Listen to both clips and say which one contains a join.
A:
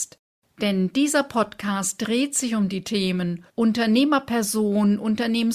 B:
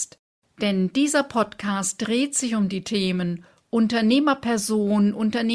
A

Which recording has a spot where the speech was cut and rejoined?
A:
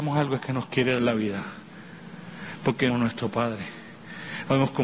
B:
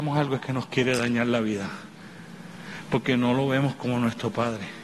A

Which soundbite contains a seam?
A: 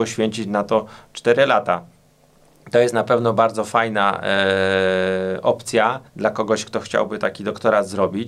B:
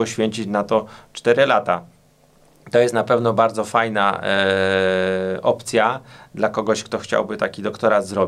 A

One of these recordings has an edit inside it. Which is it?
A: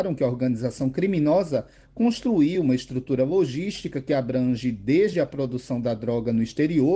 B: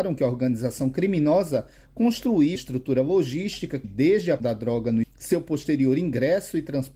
B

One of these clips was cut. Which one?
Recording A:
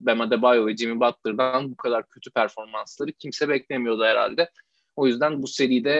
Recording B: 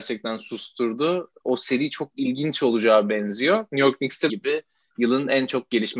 B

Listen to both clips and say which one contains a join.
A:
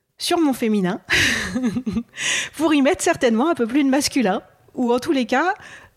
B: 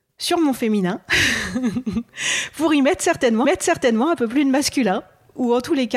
B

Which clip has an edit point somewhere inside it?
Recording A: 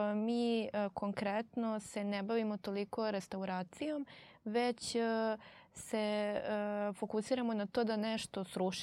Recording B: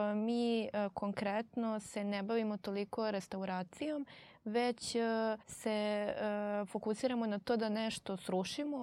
B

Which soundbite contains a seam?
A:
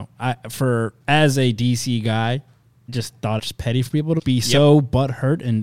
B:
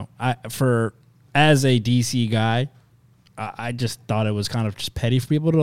A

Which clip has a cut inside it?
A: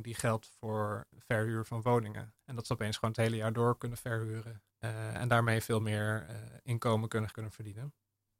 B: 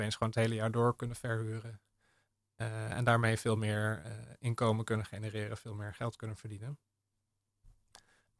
A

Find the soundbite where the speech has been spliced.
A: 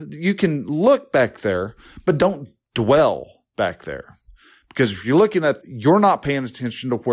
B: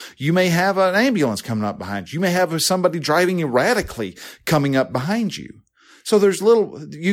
A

